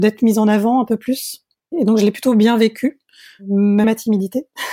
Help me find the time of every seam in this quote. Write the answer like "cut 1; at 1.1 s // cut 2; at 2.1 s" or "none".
cut 1; at 1.6 s // cut 2; at 3.8 s